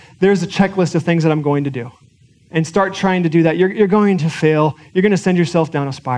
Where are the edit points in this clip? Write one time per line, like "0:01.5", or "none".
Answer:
0:02.0